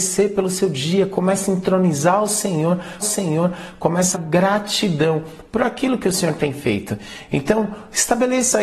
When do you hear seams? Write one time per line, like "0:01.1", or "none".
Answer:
0:03.0
0:04.1